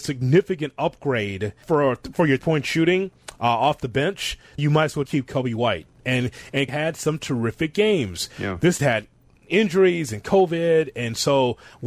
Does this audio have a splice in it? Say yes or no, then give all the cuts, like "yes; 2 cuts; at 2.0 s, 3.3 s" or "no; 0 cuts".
yes; 6 cuts; at 1.6 s, 2.4 s, 4.6 s, 5.1 s, 6.7 s, 8.8 s